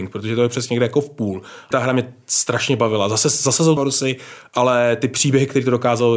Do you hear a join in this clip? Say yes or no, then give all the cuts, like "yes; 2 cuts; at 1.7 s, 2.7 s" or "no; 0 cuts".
yes; 2 cuts; at 1.7 s, 3.8 s